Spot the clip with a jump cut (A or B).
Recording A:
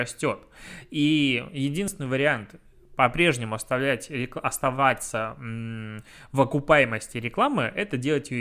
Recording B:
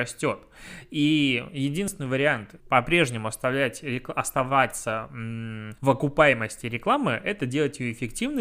B